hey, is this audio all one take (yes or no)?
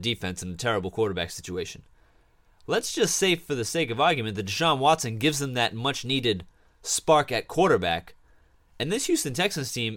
yes